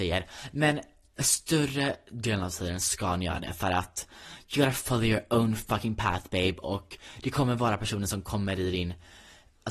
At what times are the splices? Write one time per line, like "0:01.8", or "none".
none